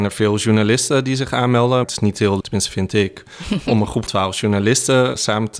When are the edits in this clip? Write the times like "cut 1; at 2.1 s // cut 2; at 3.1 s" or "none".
cut 1; at 1.8 s // cut 2; at 2.4 s // cut 3; at 4.1 s